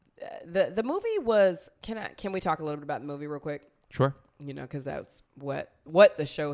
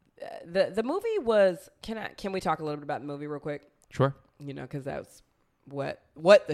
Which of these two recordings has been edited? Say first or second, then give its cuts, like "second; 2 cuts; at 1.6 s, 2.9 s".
first; 1 cut; at 5.3 s